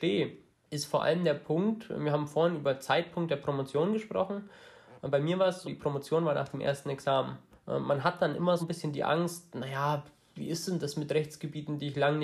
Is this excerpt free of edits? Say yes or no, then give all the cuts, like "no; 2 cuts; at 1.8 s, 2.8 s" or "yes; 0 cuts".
no; 3 cuts; at 5.6 s, 7.5 s, 8.6 s